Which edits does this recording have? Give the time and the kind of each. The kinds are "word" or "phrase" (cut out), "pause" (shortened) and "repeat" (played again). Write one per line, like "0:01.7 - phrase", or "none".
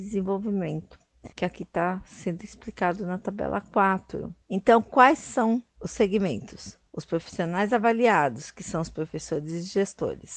0:01.3 - pause
0:04.4 - pause
0:05.7 - pause
0:06.9 - pause